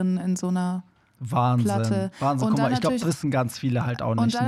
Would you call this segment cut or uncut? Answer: cut